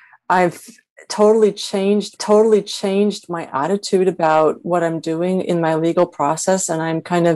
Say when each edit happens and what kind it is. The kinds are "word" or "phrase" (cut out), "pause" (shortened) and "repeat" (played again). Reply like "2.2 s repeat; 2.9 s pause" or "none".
2.2 s repeat